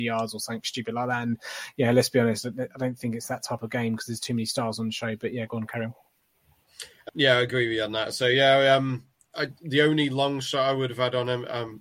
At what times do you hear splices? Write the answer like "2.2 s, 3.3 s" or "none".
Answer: 7.1 s

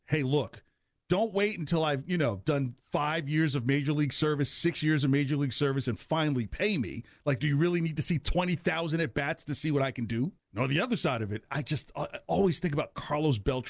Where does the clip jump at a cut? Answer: 2.8 s, 10.4 s

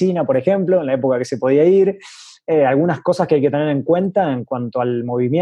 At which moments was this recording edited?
none

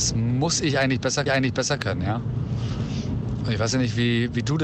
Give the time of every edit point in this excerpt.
1.3 s

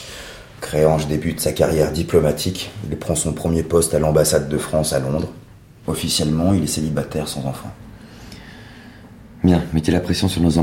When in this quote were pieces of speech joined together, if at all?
none

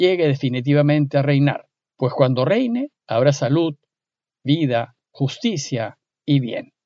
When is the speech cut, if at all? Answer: 1.9 s, 3.0 s, 5.0 s

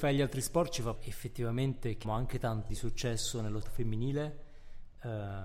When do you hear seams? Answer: 1.0 s, 2.0 s, 2.7 s, 3.6 s

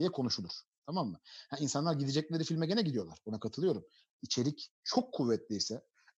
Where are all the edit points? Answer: none

